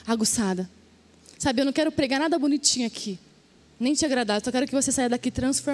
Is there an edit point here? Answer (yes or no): yes